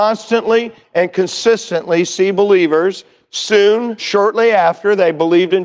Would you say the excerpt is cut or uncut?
cut